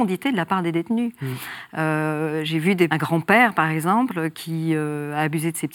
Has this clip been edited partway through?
yes; 1 cut; at 2.9 s

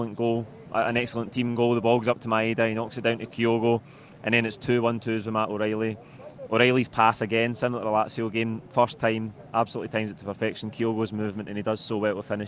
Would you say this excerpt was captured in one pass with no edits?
yes; 0 cuts

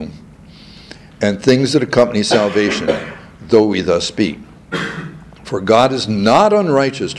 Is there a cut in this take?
no; 0 cuts

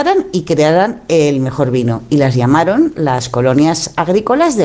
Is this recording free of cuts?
yes; 0 cuts

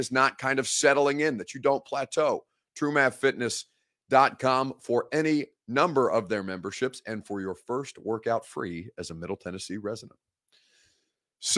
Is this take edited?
no; 0 cuts

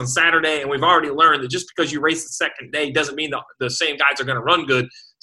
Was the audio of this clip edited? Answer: no; 0 cuts

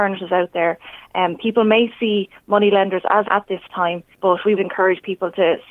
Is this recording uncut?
no; 3 cuts; at 3.2 s, 4.1 s, 4.6 s

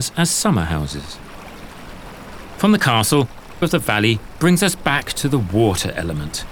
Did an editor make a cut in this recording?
yes; 1 cut; at 3.6 s

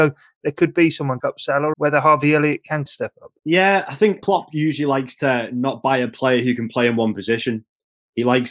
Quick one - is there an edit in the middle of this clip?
yes; 5 cuts; at 1.2 s, 1.7 s, 2.9 s, 3.4 s, 4.2 s

